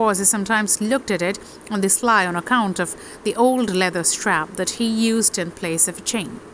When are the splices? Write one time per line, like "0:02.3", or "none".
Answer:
none

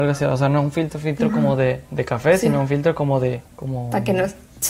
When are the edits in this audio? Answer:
0:03.5

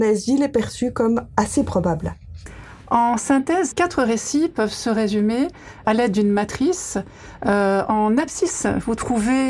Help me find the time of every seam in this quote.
0:03.7
0:05.8
0:07.9

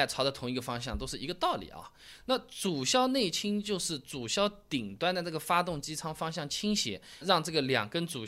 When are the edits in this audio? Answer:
0:07.2

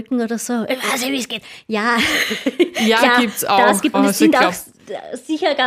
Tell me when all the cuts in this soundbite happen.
0:03.9

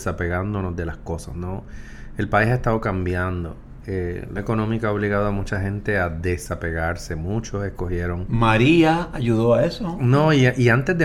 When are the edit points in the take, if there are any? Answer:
0:04.4

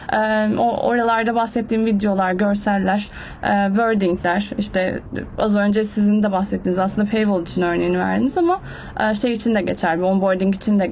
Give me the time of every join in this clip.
none

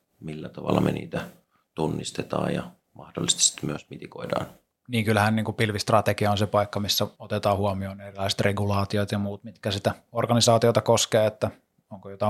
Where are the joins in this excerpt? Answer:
none

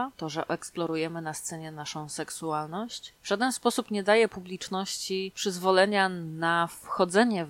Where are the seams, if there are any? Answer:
none

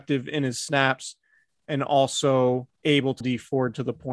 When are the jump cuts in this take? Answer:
0:02.7
0:03.2

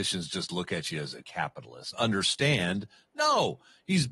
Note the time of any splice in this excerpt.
0:01.2
0:01.9

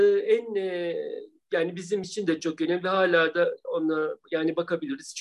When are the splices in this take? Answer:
none

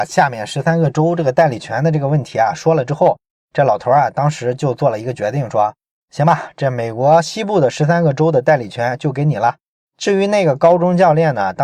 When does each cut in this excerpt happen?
none

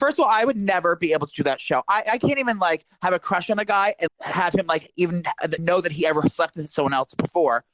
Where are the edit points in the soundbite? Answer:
0:04.1
0:05.6

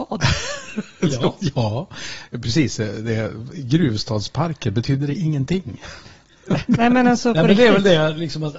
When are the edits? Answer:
none

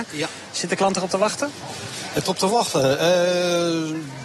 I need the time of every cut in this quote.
0:02.2

